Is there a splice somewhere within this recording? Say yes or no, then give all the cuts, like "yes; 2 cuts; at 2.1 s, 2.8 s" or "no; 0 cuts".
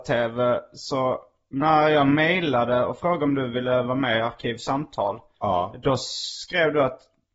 no; 0 cuts